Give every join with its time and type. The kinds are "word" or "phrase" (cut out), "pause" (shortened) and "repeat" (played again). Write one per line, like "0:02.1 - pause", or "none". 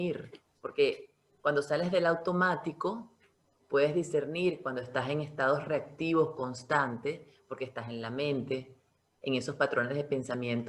none